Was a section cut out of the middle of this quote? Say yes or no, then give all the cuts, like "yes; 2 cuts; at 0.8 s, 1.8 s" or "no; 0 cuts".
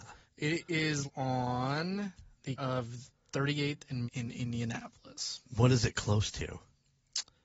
yes; 4 cuts; at 1.0 s, 2.6 s, 4.1 s, 5.5 s